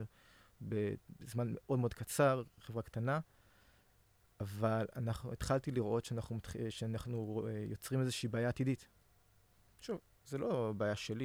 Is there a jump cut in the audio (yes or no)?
no